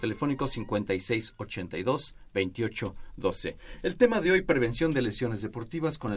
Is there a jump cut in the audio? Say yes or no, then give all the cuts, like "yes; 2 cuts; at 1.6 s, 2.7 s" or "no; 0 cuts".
no; 0 cuts